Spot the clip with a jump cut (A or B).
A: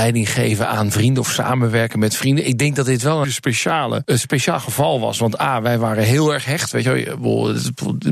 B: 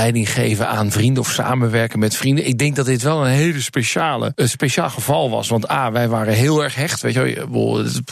A